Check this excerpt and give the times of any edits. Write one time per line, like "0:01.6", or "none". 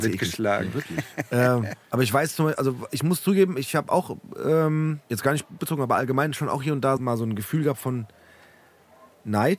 0:01.8
0:05.0
0:05.6
0:07.0